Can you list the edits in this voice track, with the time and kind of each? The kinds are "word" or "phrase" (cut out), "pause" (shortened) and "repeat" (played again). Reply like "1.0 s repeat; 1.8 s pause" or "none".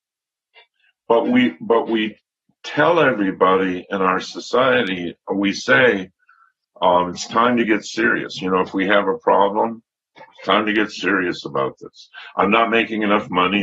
none